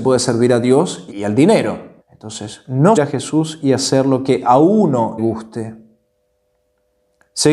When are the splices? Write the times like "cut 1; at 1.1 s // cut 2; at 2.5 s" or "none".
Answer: cut 1; at 1.1 s // cut 2; at 2.0 s // cut 3; at 3.0 s // cut 4; at 5.2 s